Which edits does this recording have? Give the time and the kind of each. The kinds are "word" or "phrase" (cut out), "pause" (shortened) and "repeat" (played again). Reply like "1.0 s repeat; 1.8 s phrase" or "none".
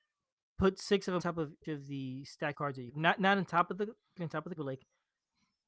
1.2 s phrase; 1.6 s word; 2.5 s word; 2.9 s phrase; 4.2 s word; 4.6 s word